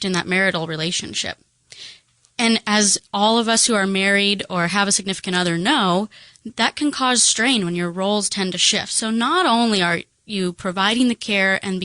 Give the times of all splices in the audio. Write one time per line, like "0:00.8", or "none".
none